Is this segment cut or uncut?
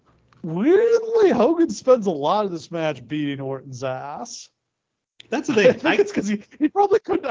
uncut